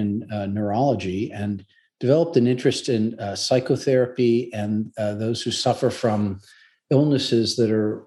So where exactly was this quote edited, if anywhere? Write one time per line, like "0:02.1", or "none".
none